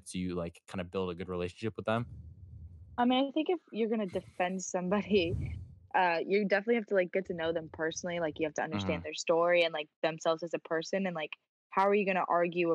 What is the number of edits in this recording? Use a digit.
0